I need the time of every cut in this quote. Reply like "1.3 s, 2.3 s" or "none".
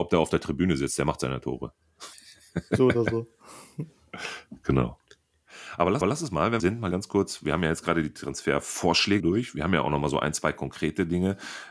2.1 s, 6.0 s, 6.6 s, 6.9 s, 9.2 s